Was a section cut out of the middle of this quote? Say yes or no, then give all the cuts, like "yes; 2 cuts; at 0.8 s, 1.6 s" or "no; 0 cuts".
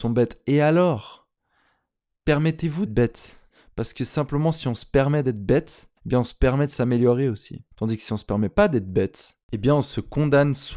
yes; 5 cuts; at 2.9 s, 3.5 s, 6.0 s, 7.7 s, 9.4 s